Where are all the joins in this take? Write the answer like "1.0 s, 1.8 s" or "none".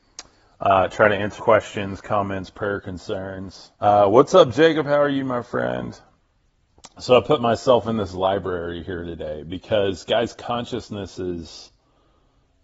1.4 s, 3.7 s